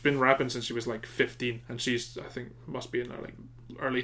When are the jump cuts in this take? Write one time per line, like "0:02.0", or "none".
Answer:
0:01.6

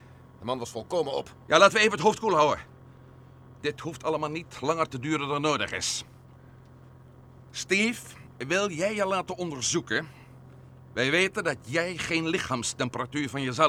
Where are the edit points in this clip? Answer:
none

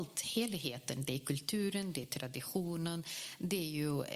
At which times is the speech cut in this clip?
none

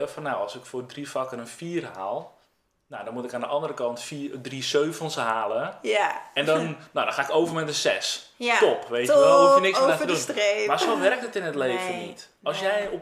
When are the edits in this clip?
none

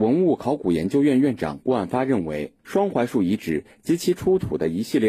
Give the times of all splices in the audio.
0:02.6

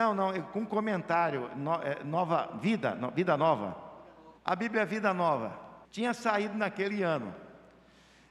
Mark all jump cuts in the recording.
0:04.4
0:05.8

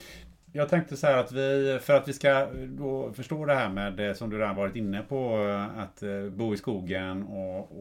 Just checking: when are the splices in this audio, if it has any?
none

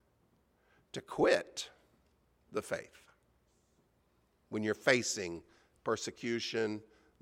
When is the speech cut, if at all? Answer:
none

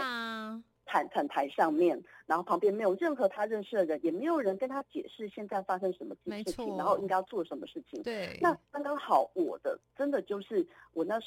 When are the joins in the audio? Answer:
0:08.7

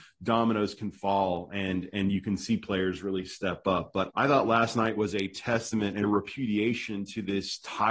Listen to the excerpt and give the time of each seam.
0:04.1
0:06.0

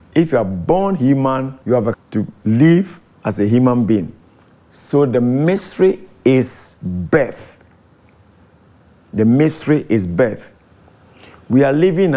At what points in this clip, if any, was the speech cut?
0:01.6
0:01.9

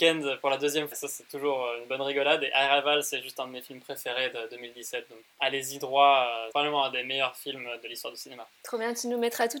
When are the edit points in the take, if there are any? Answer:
0:00.9
0:05.2
0:06.5

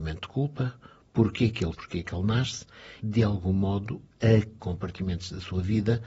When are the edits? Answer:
0:01.7
0:03.0
0:04.6

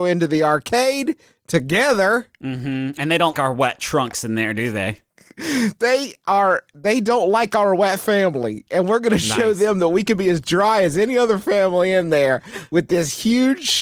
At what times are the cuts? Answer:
0:03.3

